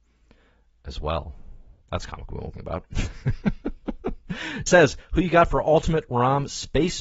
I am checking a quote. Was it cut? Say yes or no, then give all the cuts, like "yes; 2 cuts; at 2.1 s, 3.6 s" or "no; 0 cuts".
yes; 3 cuts; at 1.8 s, 2.5 s, 4.7 s